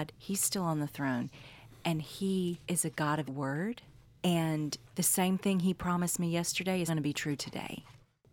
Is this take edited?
yes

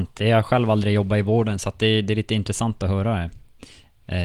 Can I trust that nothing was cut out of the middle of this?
yes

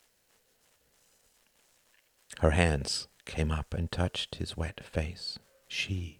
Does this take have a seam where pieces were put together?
no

